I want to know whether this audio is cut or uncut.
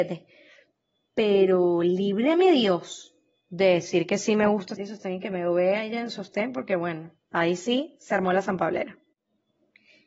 cut